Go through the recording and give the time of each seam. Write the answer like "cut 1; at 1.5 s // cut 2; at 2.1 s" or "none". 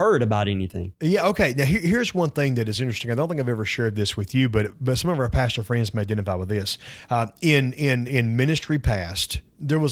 cut 1; at 8.1 s